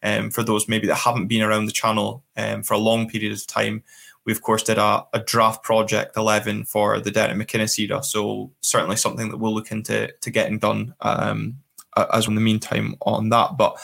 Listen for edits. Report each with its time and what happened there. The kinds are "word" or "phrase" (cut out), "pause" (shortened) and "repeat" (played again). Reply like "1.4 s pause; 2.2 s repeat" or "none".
12.3 s word

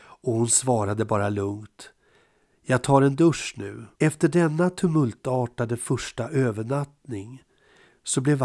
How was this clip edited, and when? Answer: 3.9 s pause

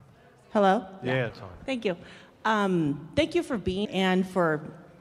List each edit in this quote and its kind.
1.3 s word; 3.8 s word

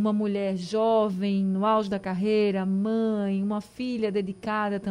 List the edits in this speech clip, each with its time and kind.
none

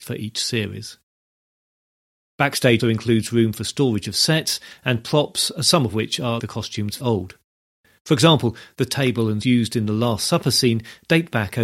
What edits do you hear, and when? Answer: 2.8 s word; 6.4 s word; 7.0 s word; 9.4 s word

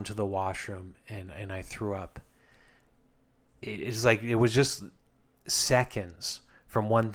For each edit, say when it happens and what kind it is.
none

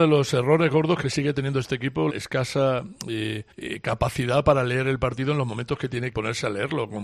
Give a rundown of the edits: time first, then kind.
2.1 s word; 3.5 s pause; 6.1 s word

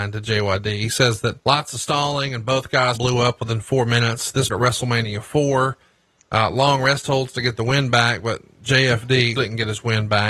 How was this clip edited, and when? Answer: 1.4 s pause; 3.0 s word; 4.5 s word; 9.4 s word

